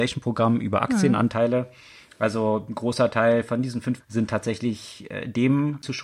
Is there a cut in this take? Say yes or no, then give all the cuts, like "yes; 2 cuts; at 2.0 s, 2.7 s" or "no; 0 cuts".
yes; 1 cut; at 4.0 s